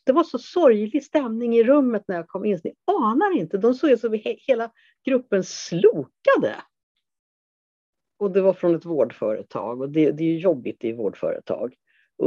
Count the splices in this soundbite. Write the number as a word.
zero